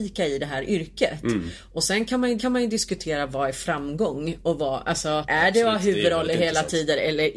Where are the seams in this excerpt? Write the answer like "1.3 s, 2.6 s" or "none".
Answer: 2.4 s